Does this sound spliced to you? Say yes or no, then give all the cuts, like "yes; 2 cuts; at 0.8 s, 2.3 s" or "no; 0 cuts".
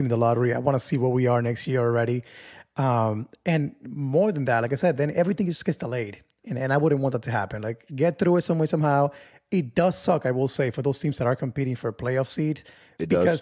no; 0 cuts